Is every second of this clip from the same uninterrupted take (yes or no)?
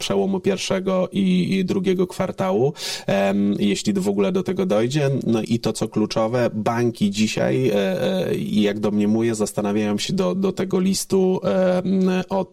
no